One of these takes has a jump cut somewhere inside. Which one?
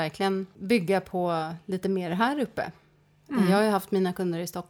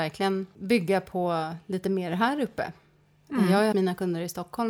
second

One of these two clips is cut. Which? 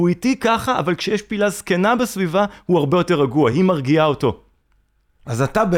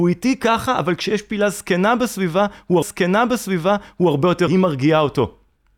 second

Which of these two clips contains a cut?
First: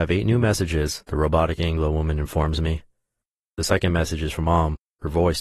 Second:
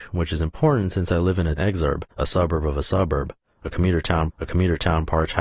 second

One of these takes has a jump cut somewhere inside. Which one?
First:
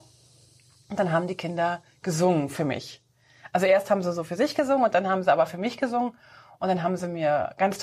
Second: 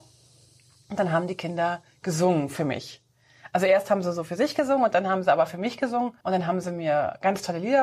second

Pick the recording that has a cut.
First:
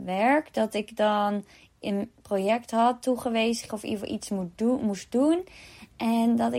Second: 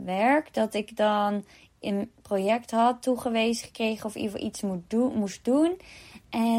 first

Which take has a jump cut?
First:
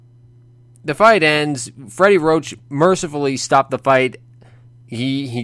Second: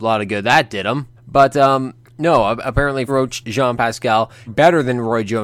second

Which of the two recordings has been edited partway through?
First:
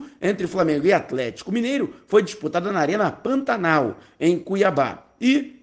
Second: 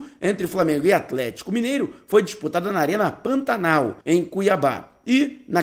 second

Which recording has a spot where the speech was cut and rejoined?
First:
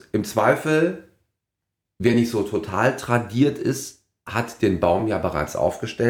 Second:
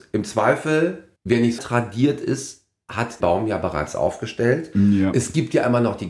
second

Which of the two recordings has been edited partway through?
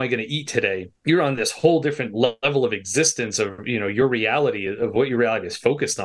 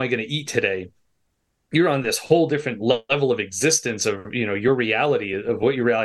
first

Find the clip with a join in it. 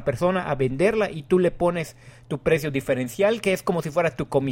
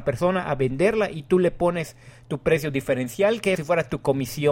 second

